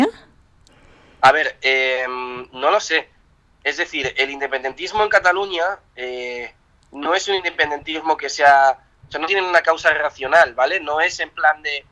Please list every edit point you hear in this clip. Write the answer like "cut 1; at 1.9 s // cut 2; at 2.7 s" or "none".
none